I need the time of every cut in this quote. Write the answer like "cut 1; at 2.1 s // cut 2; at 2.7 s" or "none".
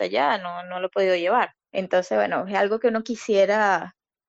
cut 1; at 1.6 s